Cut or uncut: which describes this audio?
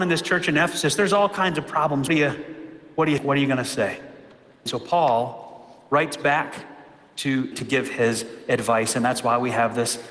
cut